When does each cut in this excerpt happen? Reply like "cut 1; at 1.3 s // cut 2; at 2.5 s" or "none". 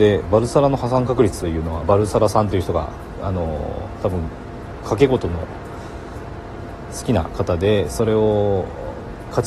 cut 1; at 1.8 s